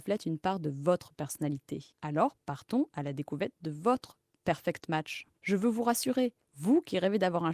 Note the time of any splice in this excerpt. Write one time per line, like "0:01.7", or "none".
0:01.9
0:05.4
0:06.4